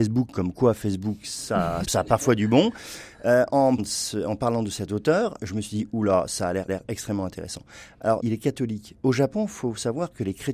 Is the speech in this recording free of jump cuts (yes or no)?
no